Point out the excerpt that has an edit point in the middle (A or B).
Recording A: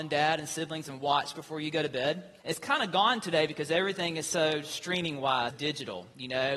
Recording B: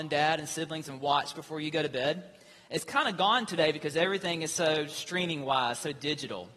A